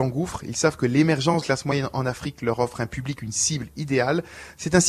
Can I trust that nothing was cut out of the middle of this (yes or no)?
no